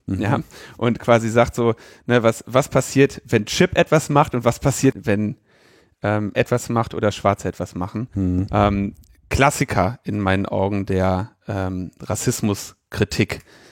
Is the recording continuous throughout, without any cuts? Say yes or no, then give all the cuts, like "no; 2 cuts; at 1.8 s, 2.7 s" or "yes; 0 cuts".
no; 3 cuts; at 2.4 s, 4.9 s, 6.3 s